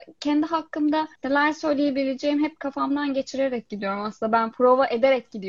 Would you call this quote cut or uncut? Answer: cut